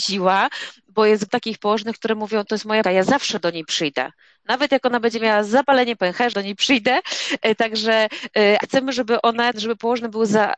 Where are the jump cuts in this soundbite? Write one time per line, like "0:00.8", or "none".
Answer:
0:01.3
0:02.8
0:06.3
0:08.6
0:09.5